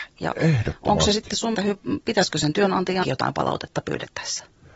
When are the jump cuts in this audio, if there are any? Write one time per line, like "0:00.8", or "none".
0:01.5
0:03.0